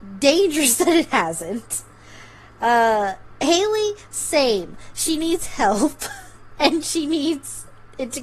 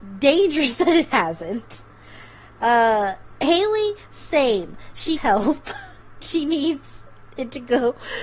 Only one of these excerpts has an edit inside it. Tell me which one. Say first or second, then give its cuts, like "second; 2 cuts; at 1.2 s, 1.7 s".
second; 2 cuts; at 5.2 s, 6.2 s